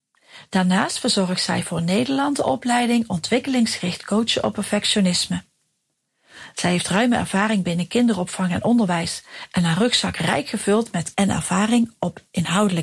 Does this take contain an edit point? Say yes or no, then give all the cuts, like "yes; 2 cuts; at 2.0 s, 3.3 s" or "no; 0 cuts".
yes; 1 cut; at 11.1 s